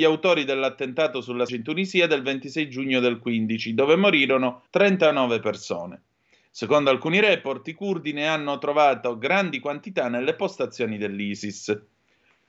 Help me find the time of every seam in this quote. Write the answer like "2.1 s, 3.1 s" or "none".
1.5 s, 4.7 s